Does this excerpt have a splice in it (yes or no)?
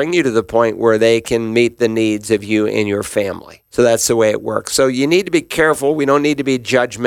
yes